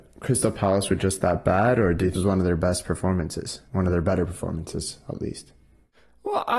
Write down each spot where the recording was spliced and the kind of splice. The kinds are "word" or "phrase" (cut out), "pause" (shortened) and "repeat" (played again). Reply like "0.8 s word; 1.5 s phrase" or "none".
2.1 s phrase; 3.7 s pause